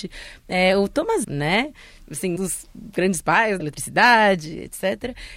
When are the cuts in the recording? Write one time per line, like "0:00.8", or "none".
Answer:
0:01.2
0:02.4
0:03.6